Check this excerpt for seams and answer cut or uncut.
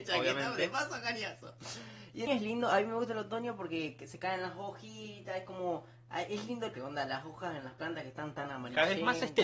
cut